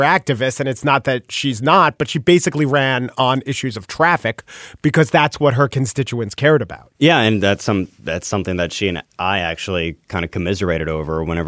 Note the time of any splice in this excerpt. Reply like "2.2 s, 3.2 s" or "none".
6.9 s